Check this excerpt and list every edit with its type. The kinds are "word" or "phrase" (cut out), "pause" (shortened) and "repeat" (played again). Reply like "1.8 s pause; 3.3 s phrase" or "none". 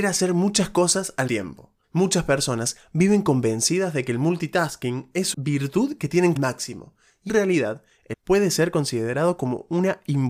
1.3 s word; 1.8 s pause; 5.3 s word; 6.4 s phrase; 7.3 s word; 8.1 s word